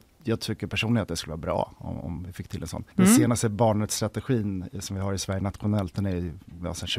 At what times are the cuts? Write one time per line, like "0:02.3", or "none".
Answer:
0:02.9